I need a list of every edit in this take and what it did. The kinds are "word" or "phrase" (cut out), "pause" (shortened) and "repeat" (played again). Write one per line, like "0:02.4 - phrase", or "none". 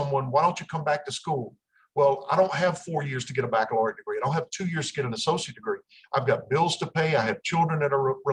none